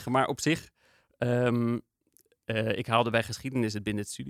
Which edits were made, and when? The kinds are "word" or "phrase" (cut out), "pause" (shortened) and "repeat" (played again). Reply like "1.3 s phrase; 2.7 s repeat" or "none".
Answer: none